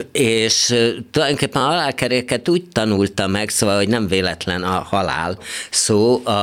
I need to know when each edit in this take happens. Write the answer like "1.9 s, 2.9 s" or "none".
none